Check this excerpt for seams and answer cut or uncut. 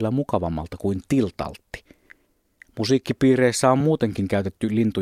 uncut